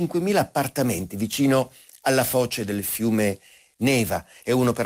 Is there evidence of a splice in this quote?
no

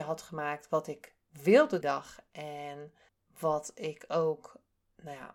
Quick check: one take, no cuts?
no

